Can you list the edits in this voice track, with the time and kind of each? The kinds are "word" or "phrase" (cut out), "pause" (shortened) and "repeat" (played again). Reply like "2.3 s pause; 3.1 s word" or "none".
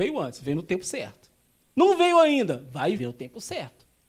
3.0 s phrase